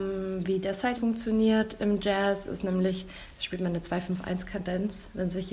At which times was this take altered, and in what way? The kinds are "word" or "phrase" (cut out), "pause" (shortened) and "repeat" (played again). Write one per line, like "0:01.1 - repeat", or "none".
0:00.9 - word